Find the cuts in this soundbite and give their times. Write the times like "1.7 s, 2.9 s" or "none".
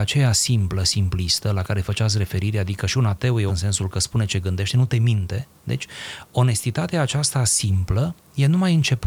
3.5 s